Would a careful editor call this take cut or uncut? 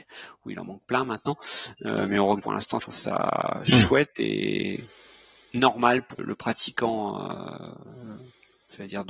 cut